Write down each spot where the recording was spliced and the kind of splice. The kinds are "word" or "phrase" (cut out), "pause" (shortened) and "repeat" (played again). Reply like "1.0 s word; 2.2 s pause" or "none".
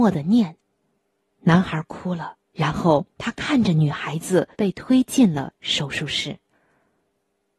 1.0 s pause; 2.5 s pause; 3.1 s pause; 4.5 s pause